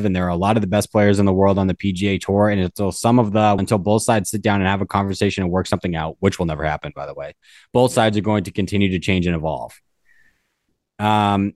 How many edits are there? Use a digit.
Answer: 1